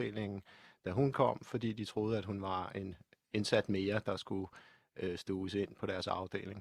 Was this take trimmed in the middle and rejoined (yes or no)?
no